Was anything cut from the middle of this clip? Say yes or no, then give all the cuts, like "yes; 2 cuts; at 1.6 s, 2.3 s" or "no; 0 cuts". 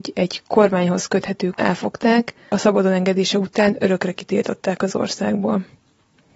yes; 2 cuts; at 1.6 s, 2.5 s